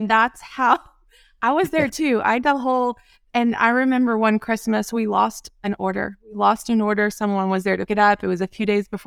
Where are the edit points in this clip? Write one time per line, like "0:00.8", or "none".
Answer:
0:02.4
0:07.9